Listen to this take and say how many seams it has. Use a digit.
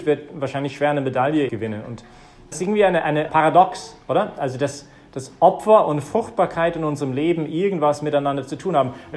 3